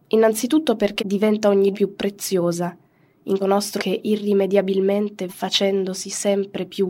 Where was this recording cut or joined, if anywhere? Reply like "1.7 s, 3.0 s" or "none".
1.0 s, 1.7 s, 3.4 s, 3.8 s, 5.3 s